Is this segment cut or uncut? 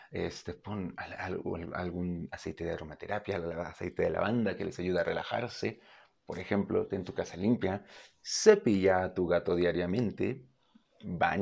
uncut